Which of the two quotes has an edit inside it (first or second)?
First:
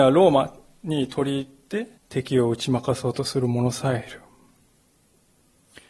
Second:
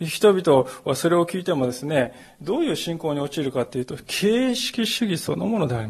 first